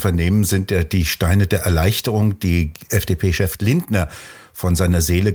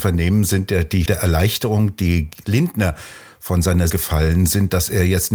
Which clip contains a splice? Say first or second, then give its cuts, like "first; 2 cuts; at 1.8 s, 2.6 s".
second; 3 cuts; at 1.1 s, 2.4 s, 3.9 s